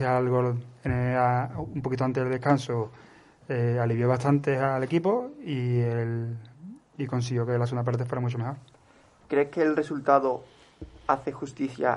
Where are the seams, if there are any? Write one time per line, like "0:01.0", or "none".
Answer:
none